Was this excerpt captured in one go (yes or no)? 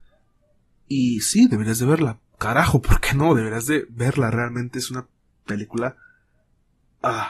yes